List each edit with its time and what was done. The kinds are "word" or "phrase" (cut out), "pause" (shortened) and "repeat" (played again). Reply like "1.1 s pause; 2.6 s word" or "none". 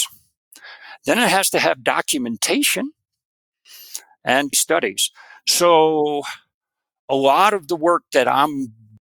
4.5 s word